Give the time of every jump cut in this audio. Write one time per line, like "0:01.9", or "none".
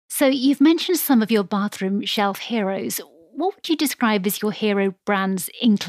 none